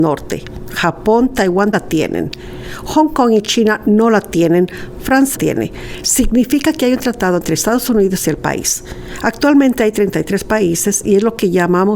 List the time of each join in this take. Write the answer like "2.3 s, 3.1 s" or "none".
1.7 s, 5.3 s